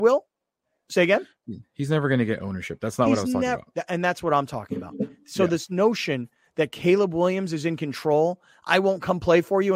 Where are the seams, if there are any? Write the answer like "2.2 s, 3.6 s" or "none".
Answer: none